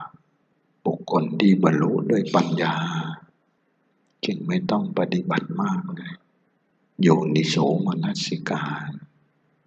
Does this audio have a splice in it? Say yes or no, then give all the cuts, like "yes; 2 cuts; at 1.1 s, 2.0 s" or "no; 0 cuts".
no; 0 cuts